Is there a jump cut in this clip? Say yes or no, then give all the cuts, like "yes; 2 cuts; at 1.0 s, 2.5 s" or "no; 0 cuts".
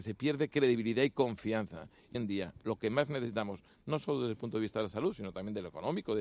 yes; 1 cut; at 2.1 s